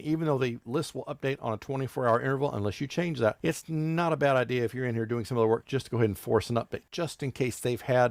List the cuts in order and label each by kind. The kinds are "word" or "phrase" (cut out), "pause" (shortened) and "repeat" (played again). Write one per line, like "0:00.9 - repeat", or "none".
0:06.9 - pause